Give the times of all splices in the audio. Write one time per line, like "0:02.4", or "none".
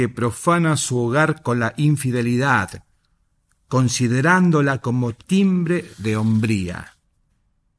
none

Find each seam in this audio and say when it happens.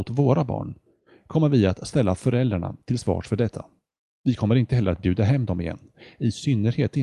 none

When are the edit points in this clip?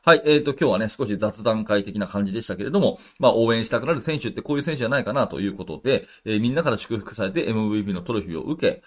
none

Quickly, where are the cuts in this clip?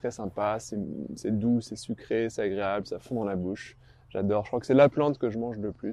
none

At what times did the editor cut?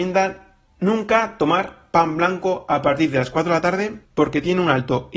0:04.0

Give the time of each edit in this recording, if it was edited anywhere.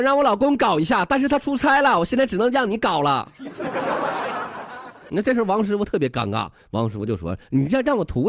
none

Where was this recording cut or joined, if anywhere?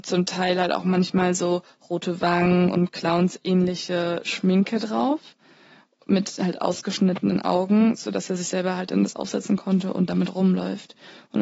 none

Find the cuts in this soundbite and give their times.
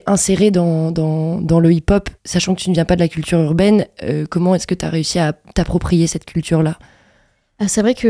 0:02.2

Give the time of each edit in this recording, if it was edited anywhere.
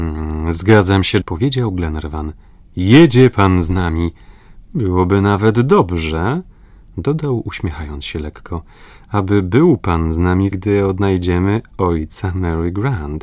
0:01.2
0:10.5

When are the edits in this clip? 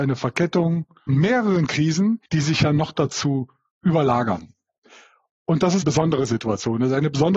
0:01.1
0:02.3
0:05.8

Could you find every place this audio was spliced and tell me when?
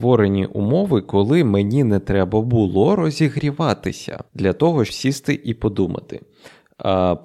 0:04.3
0:04.9

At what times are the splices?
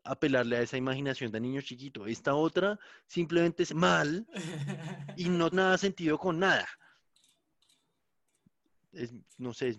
0:03.7
0:05.5

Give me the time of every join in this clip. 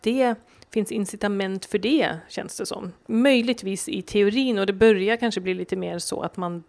0:03.0

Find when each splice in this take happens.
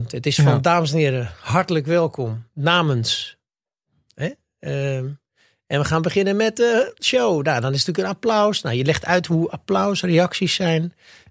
none

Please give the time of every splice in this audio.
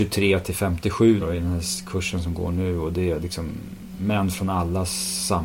0:01.2

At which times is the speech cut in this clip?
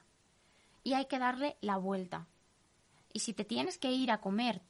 none

